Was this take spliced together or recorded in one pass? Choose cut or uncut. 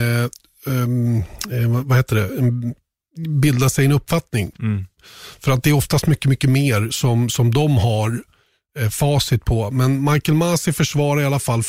uncut